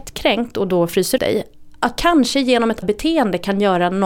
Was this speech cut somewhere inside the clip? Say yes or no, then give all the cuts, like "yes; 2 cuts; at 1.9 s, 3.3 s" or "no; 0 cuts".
yes; 3 cuts; at 1.2 s, 2.0 s, 2.8 s